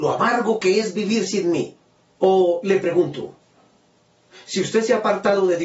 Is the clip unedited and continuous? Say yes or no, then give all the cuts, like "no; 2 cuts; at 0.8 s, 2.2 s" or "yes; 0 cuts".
yes; 0 cuts